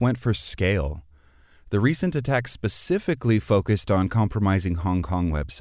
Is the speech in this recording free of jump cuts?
yes; 0 cuts

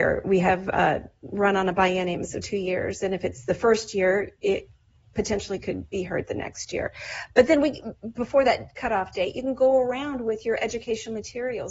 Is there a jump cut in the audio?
no; 0 cuts

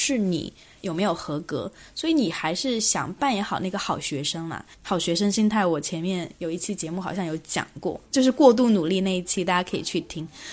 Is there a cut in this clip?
yes; 2 cuts; at 4.7 s, 8.0 s

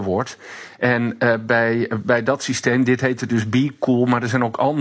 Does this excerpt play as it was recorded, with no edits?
yes; 0 cuts

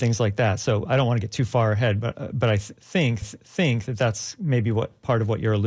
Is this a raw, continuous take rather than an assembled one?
no; 1 cut; at 3.2 s

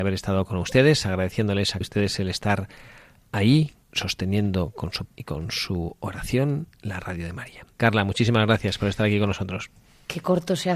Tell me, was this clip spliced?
yes; 4 cuts; at 1.8 s, 3.8 s, 5.0 s, 7.7 s

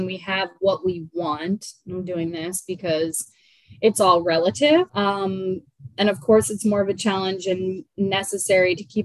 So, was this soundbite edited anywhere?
yes; 1 cut; at 4.9 s

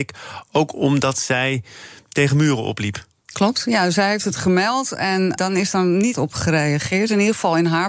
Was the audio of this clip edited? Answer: yes; 2 cuts; at 5.4 s, 6.1 s

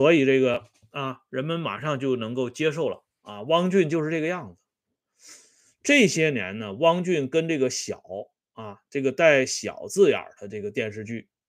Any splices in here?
no; 0 cuts

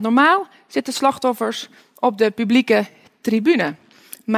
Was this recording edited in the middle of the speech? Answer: no; 0 cuts

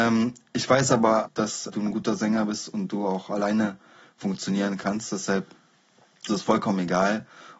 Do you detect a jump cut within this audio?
yes; 3 cuts; at 1.2 s, 1.7 s, 6.3 s

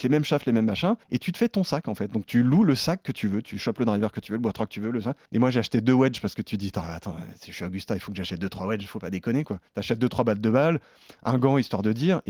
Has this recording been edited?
yes; 3 cuts; at 1.0 s, 5.3 s, 9.7 s

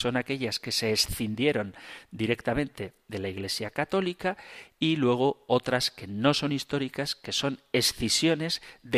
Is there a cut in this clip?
no; 0 cuts

